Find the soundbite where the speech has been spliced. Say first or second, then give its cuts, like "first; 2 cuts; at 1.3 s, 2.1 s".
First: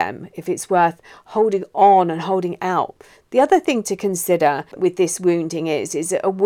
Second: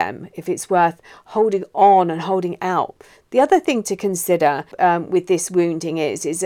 first; 1 cut; at 4.8 s